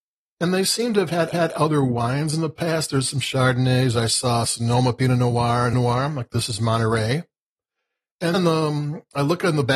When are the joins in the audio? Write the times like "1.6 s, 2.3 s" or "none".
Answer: 1.3 s, 5.7 s, 8.3 s